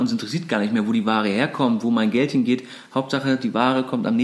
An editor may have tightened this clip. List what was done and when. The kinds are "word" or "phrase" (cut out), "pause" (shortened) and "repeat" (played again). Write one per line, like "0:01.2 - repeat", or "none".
none